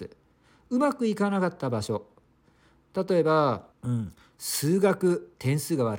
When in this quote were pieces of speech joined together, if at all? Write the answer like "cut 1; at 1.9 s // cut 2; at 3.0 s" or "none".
cut 1; at 3.7 s